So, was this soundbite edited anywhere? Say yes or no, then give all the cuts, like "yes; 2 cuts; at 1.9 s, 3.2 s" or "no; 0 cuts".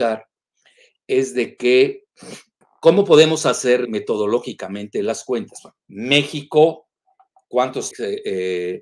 yes; 4 cuts; at 2.6 s, 3.8 s, 5.8 s, 7.9 s